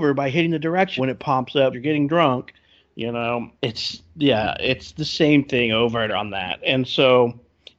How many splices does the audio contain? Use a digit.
4